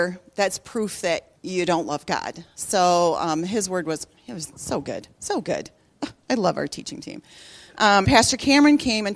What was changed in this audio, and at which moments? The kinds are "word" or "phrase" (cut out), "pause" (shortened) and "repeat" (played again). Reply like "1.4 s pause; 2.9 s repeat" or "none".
1.4 s pause; 8.0 s phrase